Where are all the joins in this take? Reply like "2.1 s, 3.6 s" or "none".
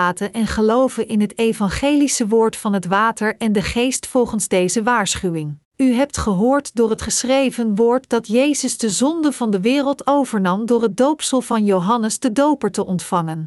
5.7 s